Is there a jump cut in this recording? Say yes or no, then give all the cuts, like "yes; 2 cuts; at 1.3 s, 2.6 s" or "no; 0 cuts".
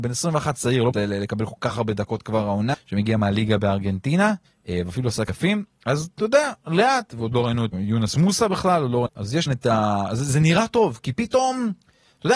yes; 7 cuts; at 0.9 s, 2.7 s, 4.4 s, 5.3 s, 7.7 s, 9.1 s, 9.5 s